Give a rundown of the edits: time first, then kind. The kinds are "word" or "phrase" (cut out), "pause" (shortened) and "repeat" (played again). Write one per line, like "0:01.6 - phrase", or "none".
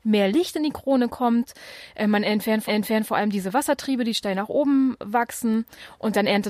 0:02.7 - repeat